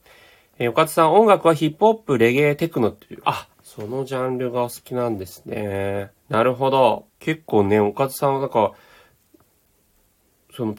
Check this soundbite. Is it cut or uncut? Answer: cut